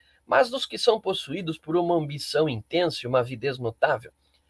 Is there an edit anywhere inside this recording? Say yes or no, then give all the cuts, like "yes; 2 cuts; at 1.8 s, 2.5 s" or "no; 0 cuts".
no; 0 cuts